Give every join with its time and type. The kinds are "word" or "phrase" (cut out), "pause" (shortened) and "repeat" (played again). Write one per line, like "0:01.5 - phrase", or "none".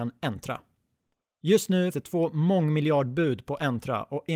0:01.9 - word